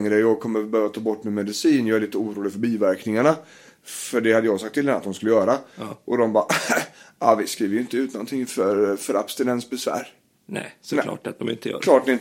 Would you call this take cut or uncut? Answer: uncut